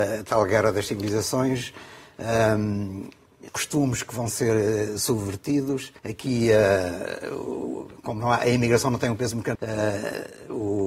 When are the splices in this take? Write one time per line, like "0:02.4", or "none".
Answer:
0:03.5
0:06.0
0:09.5

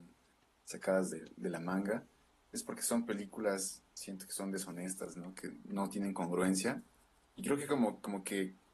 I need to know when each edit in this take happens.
none

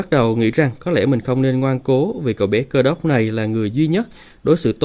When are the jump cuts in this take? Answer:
none

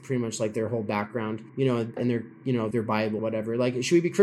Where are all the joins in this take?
0:01.5
0:02.0
0:02.7
0:03.2

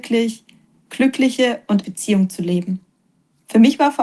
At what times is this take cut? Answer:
0:01.8

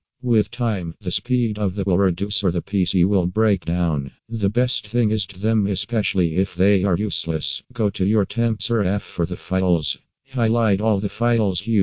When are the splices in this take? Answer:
0:01.9
0:04.2
0:05.3
0:07.6
0:08.3
0:08.6

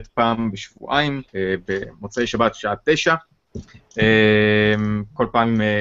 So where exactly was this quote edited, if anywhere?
0:01.3

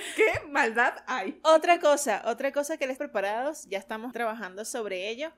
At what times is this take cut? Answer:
0:03.0
0:04.1

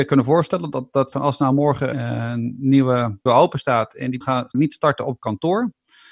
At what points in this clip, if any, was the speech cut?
0:01.1
0:01.9
0:03.3
0:04.2
0:04.5

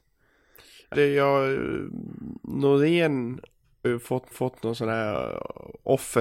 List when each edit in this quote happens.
0:00.9
0:03.8
0:04.3

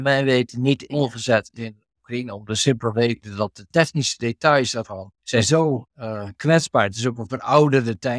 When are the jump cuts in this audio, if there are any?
0:05.1
0:05.9

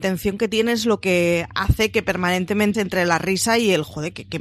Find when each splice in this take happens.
0:02.7

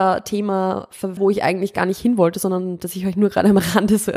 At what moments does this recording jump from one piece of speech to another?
0:01.2

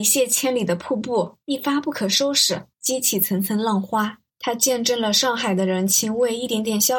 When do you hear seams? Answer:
0:01.4
0:02.7
0:04.3

